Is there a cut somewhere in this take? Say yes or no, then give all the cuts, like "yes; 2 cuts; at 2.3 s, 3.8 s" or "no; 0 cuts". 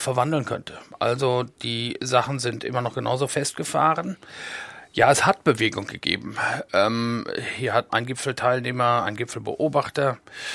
yes; 1 cut; at 7.9 s